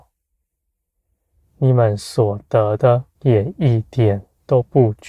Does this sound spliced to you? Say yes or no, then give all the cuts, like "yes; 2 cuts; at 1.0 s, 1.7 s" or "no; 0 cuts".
yes; 1 cut; at 3.1 s